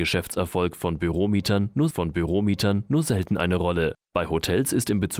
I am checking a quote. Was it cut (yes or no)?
yes